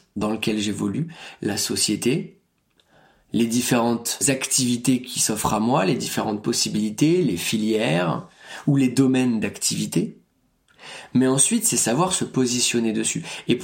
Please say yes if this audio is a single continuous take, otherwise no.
yes